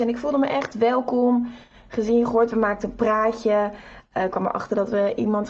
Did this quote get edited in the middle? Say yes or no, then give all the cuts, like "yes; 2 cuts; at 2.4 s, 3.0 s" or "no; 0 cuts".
no; 0 cuts